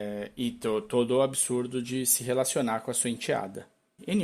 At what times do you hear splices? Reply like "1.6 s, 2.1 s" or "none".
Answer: none